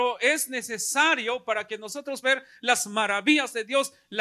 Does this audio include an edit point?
yes; 1 cut; at 2.2 s

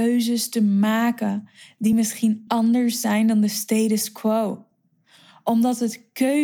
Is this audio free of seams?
yes; 0 cuts

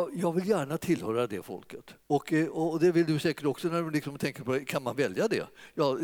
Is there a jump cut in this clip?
yes; 1 cut; at 2.0 s

